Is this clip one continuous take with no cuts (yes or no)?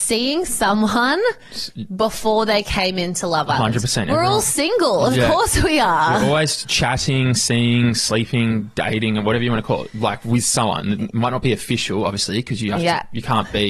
yes